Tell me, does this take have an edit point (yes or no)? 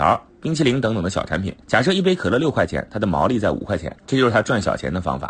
yes